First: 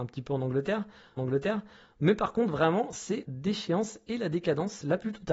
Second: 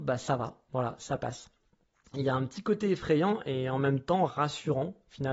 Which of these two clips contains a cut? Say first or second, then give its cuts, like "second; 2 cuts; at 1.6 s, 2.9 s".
first; 2 cuts; at 1.2 s, 3.2 s